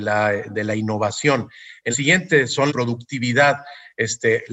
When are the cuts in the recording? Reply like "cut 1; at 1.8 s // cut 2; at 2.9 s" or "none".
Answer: cut 1; at 1.9 s // cut 2; at 2.7 s